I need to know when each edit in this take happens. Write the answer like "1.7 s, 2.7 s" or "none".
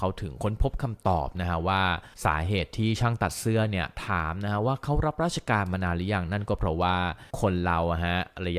2.1 s, 7.3 s